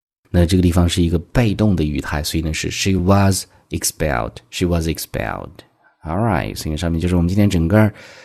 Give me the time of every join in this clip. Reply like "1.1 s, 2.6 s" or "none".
none